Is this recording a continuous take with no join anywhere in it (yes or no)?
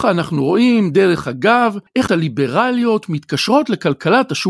no